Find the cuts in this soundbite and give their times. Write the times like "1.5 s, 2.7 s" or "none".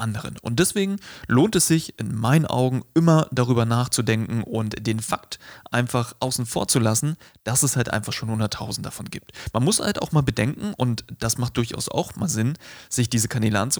none